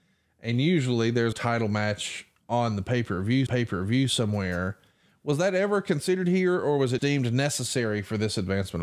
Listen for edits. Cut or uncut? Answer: cut